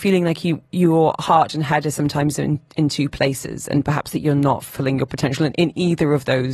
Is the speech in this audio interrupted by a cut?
no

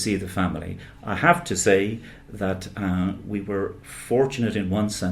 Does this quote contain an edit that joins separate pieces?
no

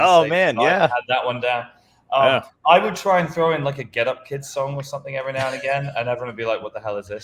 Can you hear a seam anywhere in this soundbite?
no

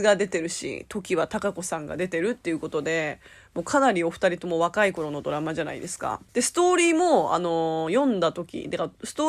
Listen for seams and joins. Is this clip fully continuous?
no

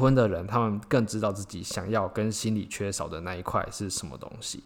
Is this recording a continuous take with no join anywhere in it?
yes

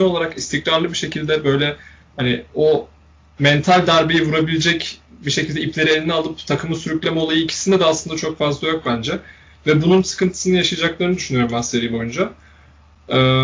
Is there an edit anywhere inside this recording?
no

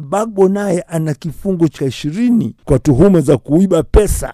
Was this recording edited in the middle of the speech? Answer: yes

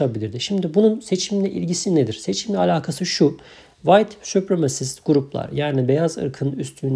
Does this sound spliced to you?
no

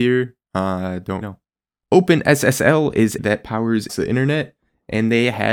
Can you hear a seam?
yes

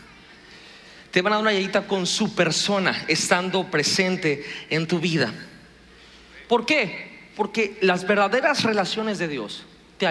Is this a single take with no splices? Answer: yes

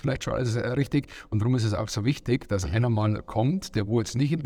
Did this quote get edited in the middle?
no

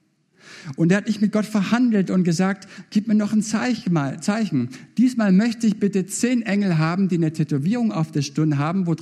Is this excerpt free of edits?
yes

